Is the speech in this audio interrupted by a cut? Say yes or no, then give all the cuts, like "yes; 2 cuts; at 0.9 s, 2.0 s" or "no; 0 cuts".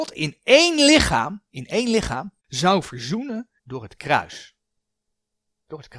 yes; 2 cuts; at 2.4 s, 3.6 s